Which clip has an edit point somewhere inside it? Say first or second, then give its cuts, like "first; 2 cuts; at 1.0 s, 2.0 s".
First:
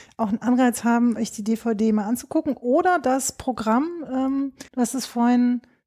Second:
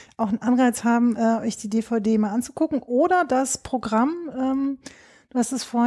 first; 2 cuts; at 1.2 s, 4.7 s